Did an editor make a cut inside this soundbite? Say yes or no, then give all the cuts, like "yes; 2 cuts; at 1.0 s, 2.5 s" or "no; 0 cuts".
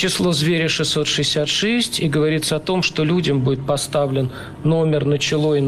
no; 0 cuts